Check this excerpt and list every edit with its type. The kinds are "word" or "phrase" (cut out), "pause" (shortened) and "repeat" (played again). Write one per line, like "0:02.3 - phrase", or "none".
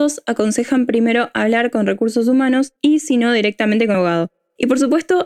0:02.8 - pause
0:03.9 - word